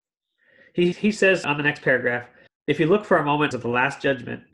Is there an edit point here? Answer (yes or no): yes